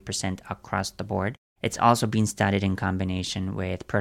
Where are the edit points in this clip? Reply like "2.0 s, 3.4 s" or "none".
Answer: none